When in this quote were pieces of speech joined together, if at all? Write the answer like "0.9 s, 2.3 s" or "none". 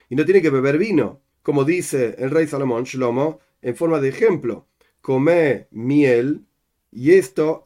1.3 s